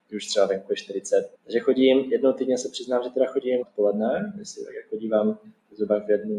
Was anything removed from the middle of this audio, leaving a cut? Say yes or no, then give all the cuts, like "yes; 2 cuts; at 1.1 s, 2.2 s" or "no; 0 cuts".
yes; 2 cuts; at 1.3 s, 3.6 s